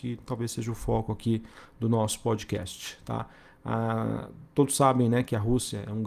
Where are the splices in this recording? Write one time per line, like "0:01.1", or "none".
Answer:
none